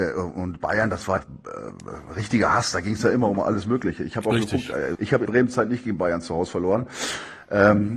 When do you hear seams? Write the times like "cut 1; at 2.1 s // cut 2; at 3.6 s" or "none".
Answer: cut 1; at 1.2 s // cut 2; at 4.9 s // cut 3; at 5.3 s